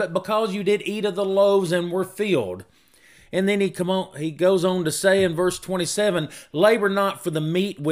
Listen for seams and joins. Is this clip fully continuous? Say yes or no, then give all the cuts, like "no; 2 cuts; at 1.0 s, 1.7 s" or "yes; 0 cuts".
yes; 0 cuts